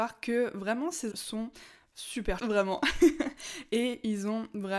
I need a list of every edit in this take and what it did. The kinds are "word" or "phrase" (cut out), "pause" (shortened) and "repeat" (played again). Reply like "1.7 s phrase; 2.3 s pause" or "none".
1.1 s word; 2.4 s word